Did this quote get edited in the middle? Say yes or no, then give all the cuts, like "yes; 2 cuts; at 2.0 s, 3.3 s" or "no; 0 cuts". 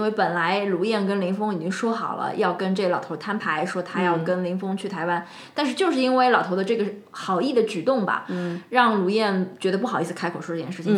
no; 0 cuts